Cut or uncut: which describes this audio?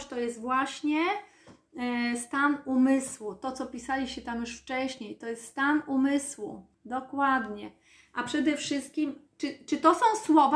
cut